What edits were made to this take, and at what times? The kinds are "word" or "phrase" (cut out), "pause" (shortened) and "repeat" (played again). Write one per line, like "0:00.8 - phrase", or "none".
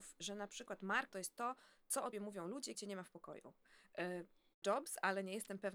0:01.1 - word
0:02.1 - word
0:02.7 - word
0:04.6 - word

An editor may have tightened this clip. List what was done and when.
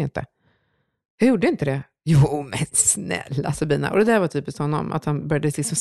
none

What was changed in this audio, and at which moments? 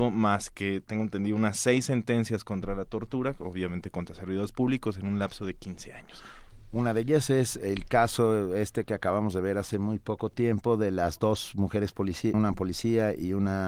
0:12.3 - word

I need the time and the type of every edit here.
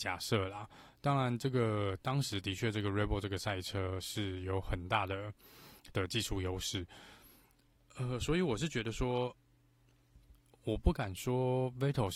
none

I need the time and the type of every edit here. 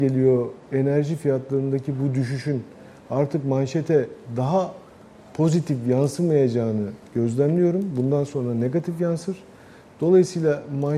none

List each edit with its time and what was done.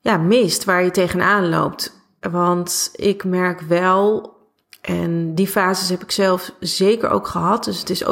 none

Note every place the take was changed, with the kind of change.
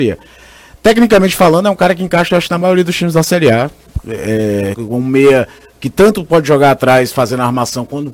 0:04.7 - word

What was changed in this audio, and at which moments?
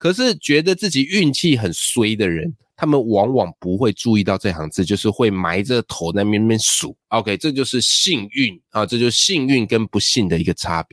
0:07.0 - pause

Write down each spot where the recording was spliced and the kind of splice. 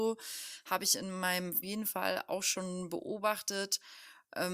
0:01.6 - phrase

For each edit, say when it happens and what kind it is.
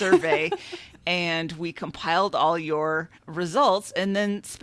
0:03.1 - pause

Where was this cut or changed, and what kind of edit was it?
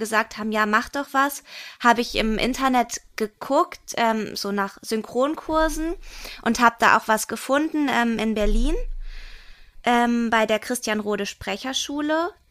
none

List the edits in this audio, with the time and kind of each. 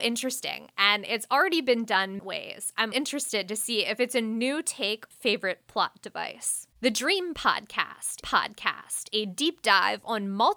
0:02.2 - phrase
0:02.9 - word
0:05.1 - phrase
0:06.7 - pause
0:08.2 - repeat

